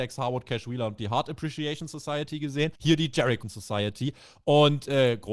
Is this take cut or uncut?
cut